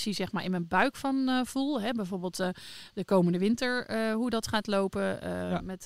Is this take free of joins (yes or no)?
yes